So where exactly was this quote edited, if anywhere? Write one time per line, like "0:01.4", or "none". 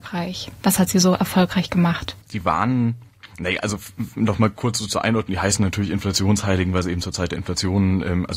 0:02.2